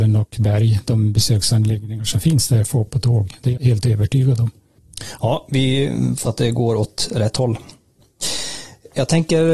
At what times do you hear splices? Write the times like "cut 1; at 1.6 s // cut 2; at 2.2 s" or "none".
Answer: cut 1; at 2.9 s // cut 2; at 3.6 s // cut 3; at 6.3 s